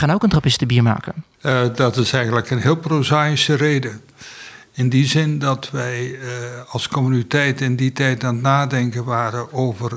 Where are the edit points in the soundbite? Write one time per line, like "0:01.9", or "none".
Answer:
0:01.3